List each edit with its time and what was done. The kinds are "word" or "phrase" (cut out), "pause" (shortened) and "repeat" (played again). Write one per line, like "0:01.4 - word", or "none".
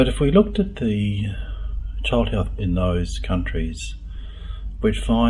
0:02.6 - word